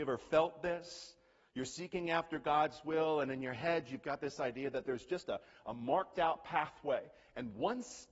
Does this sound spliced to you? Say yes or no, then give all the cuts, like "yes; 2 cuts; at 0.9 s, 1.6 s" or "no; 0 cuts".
no; 0 cuts